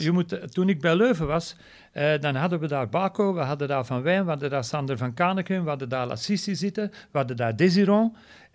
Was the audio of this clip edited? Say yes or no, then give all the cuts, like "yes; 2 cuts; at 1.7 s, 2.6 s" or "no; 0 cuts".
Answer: no; 0 cuts